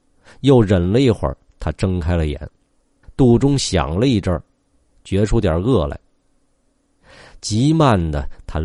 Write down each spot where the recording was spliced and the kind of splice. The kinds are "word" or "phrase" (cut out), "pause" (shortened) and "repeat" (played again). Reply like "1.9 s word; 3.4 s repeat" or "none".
none